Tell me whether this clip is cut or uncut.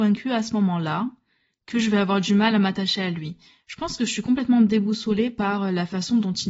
uncut